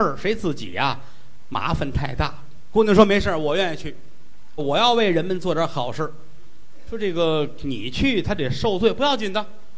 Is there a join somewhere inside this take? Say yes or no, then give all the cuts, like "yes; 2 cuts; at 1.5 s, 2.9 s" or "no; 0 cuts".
yes; 1 cut; at 4.6 s